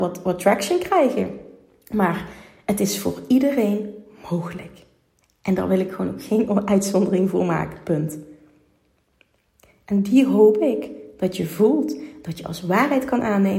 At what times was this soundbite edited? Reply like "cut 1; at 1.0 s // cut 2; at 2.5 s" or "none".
none